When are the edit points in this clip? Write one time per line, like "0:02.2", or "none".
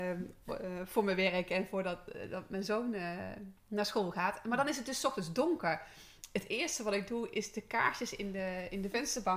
none